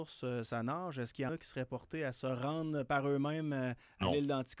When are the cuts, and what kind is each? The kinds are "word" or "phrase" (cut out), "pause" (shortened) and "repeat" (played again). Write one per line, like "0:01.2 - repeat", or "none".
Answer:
0:01.3 - word